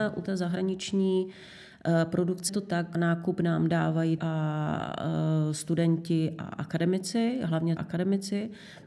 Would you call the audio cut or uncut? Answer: cut